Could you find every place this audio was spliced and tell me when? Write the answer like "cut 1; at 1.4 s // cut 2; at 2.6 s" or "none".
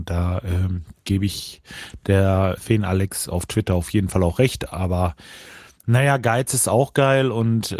cut 1; at 2.6 s